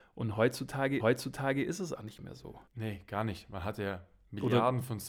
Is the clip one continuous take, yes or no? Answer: no